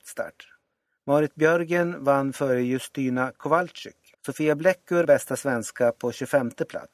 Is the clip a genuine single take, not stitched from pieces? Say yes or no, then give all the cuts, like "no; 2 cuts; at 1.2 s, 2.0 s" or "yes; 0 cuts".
no; 2 cuts; at 4.1 s, 5.0 s